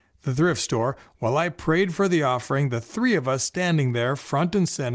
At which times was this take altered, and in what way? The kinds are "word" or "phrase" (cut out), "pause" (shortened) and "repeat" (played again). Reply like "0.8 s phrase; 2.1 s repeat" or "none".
none